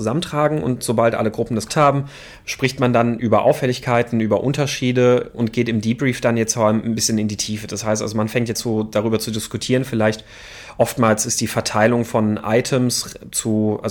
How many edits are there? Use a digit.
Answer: 2